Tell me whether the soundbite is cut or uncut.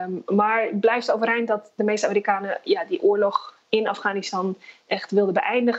uncut